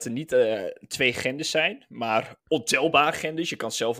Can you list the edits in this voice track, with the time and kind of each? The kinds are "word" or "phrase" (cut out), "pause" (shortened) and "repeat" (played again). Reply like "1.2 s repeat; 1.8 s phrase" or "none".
2.4 s pause